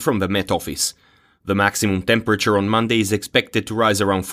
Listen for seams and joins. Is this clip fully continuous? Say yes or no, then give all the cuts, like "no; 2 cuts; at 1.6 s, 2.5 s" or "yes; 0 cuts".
yes; 0 cuts